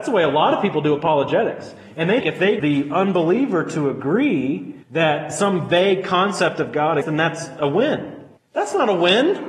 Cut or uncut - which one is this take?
cut